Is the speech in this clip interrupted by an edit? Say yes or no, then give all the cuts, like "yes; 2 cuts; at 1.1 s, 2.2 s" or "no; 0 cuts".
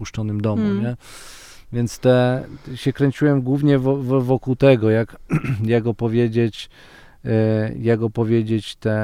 no; 0 cuts